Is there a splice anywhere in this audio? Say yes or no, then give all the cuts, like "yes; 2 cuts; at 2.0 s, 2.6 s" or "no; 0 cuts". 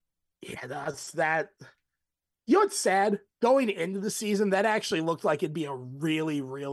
no; 0 cuts